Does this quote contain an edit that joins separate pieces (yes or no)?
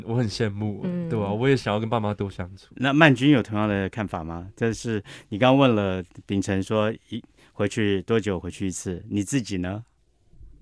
no